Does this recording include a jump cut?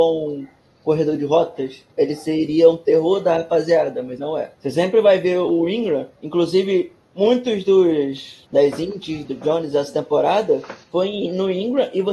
yes; 7 cuts; at 1.9 s, 4.2 s, 4.5 s, 6.1 s, 8.5 s, 9.3 s, 10.8 s

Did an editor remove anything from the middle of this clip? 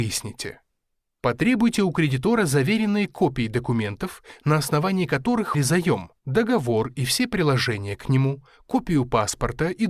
yes; 2 cuts; at 5.5 s, 6.2 s

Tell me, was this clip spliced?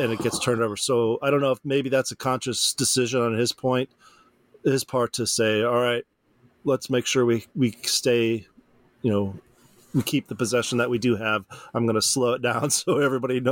no; 0 cuts

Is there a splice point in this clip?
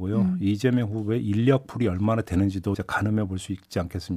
yes; 1 cut; at 2.7 s

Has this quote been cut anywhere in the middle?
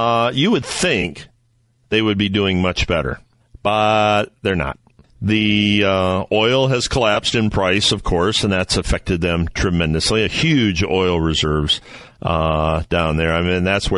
no; 0 cuts

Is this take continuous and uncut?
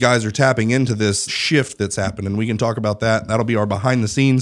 no; 1 cut; at 1.3 s

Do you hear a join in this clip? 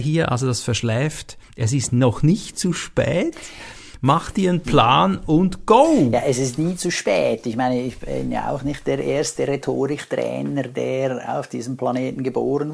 no; 0 cuts

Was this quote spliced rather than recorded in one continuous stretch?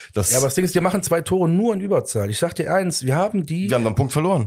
no; 0 cuts

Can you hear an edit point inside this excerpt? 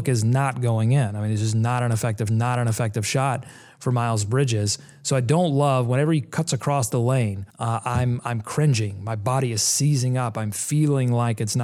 yes; 2 cuts; at 2.3 s, 7.5 s

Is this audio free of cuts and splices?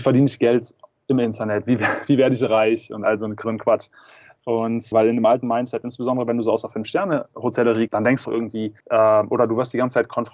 no; 5 cuts; at 3.4 s, 4.9 s, 7.9 s, 8.2 s, 8.8 s

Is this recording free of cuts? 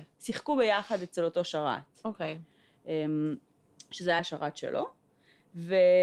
no; 1 cut; at 4.2 s

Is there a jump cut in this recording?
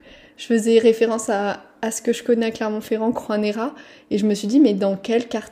no; 0 cuts

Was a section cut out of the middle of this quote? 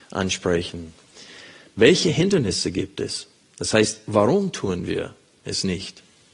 no; 0 cuts

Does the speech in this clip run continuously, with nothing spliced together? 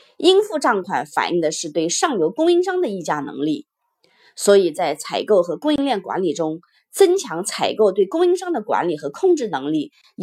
yes; 0 cuts

